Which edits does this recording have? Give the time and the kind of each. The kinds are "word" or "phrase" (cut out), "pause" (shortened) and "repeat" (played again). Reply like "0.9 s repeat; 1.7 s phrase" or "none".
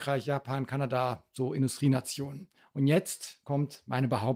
none